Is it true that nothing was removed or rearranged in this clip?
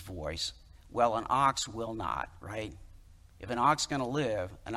yes; 0 cuts

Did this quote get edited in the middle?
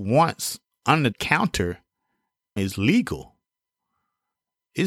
yes; 2 cuts; at 1.1 s, 2.6 s

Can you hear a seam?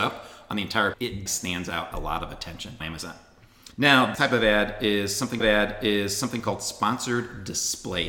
yes; 7 cuts; at 0.9 s, 1.3 s, 1.9 s, 2.8 s, 3.7 s, 4.2 s, 5.4 s

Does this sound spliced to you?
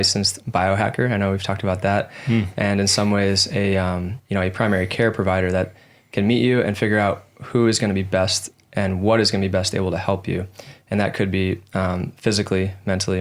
yes; 1 cut; at 4.2 s

